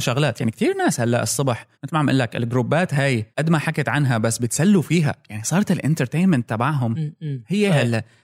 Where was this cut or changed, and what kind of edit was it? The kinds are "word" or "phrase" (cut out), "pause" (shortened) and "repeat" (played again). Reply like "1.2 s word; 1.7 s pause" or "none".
1.7 s pause; 3.3 s pause